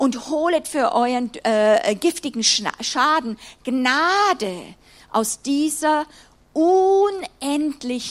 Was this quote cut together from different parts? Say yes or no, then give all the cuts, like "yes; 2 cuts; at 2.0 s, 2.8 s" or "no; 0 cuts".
no; 0 cuts